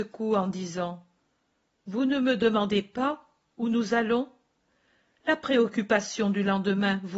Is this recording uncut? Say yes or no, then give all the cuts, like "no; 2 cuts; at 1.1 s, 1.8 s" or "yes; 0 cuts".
yes; 0 cuts